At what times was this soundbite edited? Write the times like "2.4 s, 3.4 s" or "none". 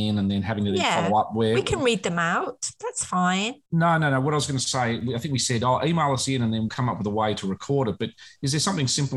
3.7 s, 6.7 s